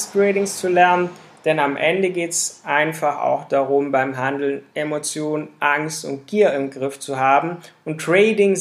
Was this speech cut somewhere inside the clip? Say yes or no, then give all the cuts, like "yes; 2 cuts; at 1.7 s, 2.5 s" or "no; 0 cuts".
no; 0 cuts